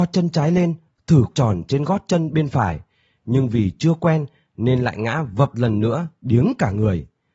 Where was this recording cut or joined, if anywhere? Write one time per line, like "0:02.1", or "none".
0:01.3
0:05.5